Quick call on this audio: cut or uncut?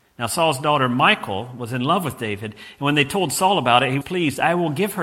cut